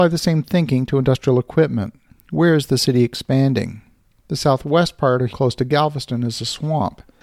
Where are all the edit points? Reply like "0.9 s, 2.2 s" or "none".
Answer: 2.1 s, 5.3 s